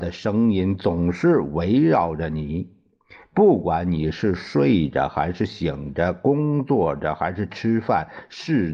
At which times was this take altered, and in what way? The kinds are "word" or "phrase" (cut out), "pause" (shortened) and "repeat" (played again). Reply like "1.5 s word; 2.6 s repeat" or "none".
none